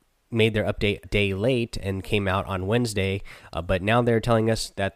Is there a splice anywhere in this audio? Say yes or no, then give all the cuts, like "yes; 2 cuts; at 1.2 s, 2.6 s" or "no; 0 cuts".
yes; 1 cut; at 1.0 s